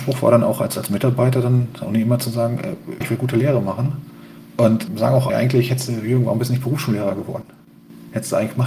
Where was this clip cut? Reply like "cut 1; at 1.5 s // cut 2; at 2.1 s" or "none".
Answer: cut 1; at 1.8 s // cut 2; at 3.0 s // cut 3; at 4.9 s // cut 4; at 5.3 s